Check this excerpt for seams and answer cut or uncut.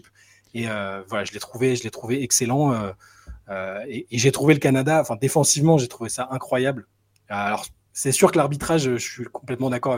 uncut